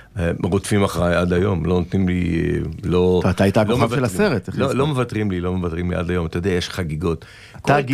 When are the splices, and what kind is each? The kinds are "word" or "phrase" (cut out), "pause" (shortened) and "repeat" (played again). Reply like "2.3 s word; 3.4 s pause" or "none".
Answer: none